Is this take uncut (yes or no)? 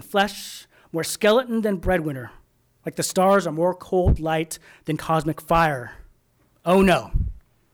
yes